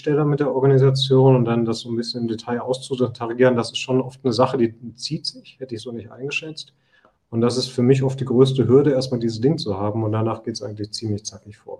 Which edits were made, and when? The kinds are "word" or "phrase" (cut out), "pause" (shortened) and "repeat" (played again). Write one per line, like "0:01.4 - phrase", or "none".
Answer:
none